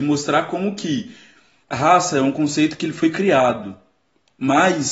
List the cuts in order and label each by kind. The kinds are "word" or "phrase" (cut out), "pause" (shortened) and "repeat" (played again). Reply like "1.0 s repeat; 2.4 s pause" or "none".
none